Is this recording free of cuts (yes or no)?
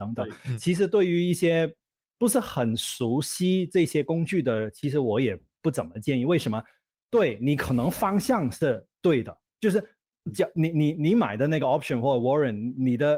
yes